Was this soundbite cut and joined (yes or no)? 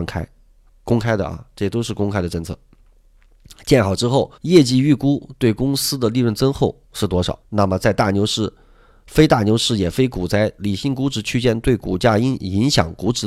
yes